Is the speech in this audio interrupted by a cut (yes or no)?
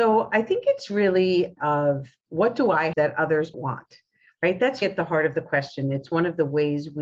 yes